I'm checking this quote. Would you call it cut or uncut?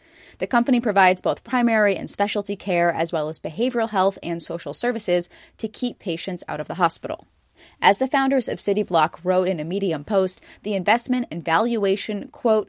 uncut